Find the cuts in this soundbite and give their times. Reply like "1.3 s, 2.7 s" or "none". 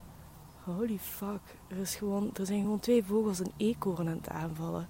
none